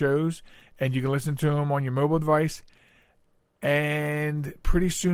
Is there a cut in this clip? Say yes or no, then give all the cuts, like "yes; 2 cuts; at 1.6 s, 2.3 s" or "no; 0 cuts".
no; 0 cuts